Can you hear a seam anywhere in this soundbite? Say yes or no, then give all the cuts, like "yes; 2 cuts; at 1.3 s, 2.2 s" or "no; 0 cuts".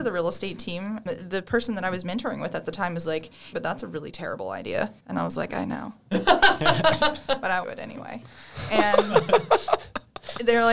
yes; 4 cuts; at 1.1 s, 3.5 s, 5.0 s, 7.6 s